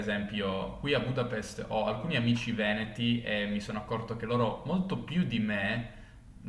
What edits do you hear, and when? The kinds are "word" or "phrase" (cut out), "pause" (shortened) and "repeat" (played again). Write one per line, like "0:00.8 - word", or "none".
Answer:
none